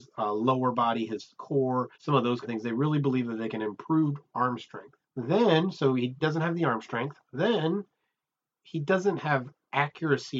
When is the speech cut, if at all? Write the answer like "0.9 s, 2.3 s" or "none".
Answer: 1.9 s, 2.4 s, 5.1 s, 6.2 s, 7.2 s